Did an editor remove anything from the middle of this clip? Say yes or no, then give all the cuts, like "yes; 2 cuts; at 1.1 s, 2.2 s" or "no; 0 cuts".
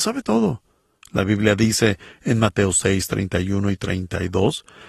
no; 0 cuts